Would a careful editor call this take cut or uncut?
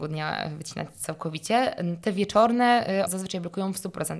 cut